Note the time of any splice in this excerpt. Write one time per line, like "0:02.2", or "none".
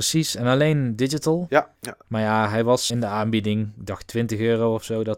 0:01.7
0:02.9